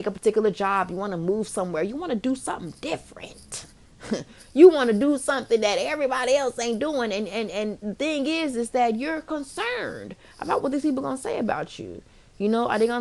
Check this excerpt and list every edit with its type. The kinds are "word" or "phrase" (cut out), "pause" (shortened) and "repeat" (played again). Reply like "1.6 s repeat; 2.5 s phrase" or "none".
none